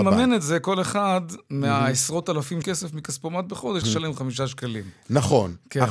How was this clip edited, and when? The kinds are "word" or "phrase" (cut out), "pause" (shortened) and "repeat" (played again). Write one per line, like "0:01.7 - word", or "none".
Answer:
0:02.6 - phrase
0:03.8 - word